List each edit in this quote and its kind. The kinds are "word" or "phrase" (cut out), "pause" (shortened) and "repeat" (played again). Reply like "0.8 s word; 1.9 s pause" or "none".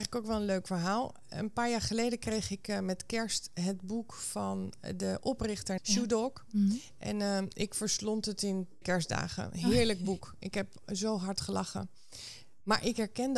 5.8 s word; 8.8 s word